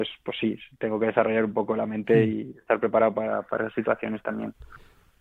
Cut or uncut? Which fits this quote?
uncut